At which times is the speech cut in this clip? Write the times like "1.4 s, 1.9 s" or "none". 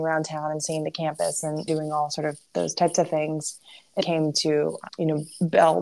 1.7 s, 4.0 s, 4.9 s